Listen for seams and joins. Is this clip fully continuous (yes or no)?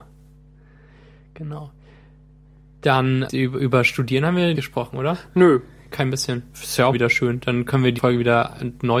no